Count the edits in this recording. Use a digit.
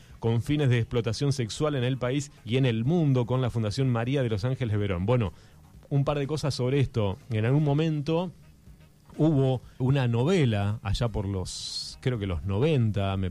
2